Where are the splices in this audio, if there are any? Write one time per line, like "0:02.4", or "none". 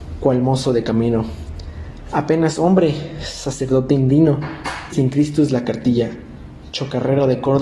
0:04.9